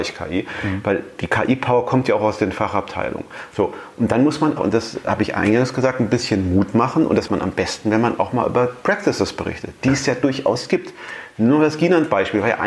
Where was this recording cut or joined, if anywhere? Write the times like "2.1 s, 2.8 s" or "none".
4.6 s, 7.3 s